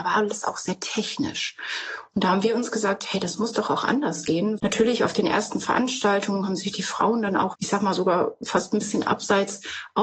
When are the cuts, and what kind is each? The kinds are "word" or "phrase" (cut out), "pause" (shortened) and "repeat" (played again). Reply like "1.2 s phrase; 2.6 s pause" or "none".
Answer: 4.6 s word; 7.5 s word